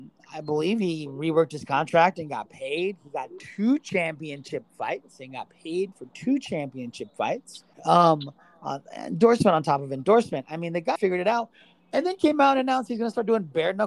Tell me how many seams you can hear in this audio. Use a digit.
2